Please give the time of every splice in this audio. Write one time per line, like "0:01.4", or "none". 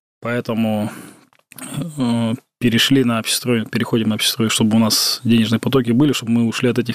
none